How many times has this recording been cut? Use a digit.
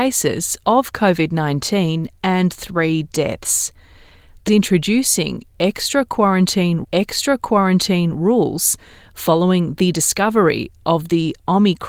2